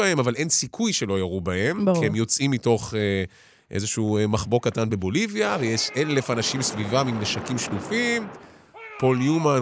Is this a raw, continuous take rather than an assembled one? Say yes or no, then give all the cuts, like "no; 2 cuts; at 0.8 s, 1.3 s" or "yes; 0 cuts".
yes; 0 cuts